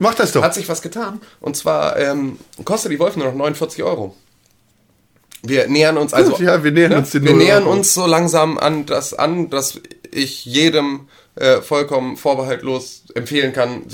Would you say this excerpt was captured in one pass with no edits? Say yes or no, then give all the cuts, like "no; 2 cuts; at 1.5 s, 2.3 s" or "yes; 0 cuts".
yes; 0 cuts